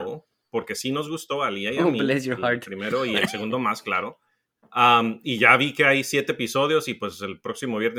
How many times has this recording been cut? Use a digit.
0